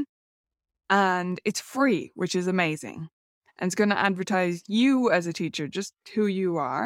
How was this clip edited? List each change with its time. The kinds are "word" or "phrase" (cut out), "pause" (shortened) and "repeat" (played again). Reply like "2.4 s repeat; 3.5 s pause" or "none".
none